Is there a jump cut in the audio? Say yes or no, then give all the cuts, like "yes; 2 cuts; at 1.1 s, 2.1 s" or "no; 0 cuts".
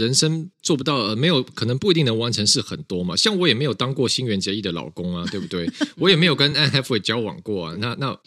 no; 0 cuts